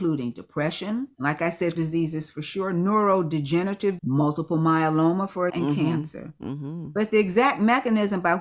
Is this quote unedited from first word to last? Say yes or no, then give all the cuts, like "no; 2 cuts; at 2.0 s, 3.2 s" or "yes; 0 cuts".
no; 3 cuts; at 1.8 s, 4.0 s, 5.5 s